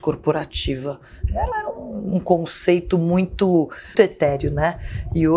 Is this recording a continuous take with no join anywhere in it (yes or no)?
no